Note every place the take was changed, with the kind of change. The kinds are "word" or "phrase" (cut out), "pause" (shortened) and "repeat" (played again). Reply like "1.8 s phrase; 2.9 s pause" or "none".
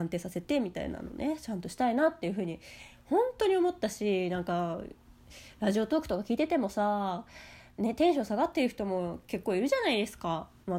7.7 s pause